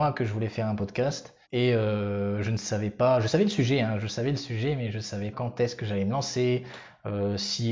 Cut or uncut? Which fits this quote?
cut